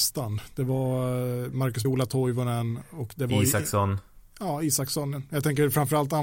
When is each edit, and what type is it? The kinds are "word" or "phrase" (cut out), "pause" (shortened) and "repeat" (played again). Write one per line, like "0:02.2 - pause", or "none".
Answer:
0:01.8 - word
0:04.3 - pause